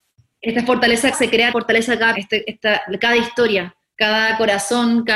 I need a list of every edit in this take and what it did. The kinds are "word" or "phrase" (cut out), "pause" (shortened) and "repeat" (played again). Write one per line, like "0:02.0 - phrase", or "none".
0:01.1 - word
0:01.5 - phrase
0:02.1 - word